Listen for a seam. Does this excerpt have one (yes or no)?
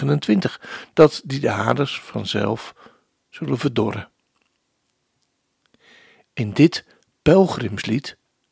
no